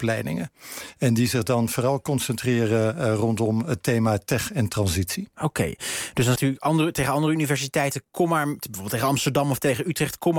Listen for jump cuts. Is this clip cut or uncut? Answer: cut